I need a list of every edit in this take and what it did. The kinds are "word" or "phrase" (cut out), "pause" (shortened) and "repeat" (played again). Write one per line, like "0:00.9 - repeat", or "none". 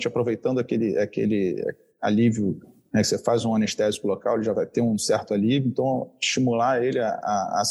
none